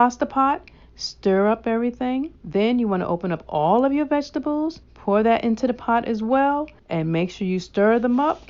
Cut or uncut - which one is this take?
cut